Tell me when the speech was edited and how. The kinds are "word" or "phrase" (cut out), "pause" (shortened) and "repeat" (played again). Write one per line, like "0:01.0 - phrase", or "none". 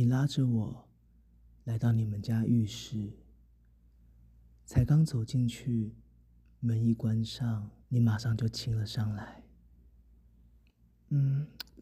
0:07.8 - pause